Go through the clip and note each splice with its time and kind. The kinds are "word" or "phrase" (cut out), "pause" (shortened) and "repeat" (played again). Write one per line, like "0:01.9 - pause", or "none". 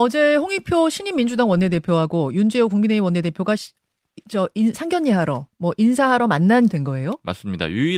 0:05.5 - pause
0:06.7 - phrase